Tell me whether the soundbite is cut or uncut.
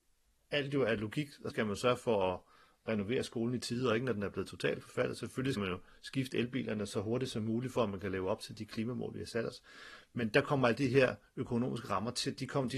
cut